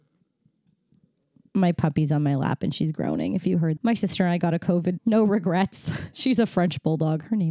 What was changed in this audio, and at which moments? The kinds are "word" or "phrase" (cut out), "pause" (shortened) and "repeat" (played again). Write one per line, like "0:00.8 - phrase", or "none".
0:03.8 - word
0:05.0 - word